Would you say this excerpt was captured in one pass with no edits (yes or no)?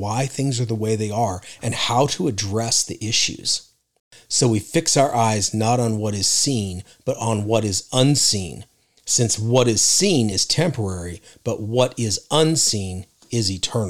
yes